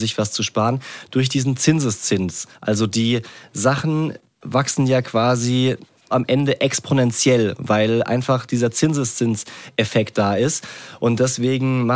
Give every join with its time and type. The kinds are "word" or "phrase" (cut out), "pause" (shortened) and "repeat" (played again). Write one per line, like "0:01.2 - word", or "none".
0:06.1 - word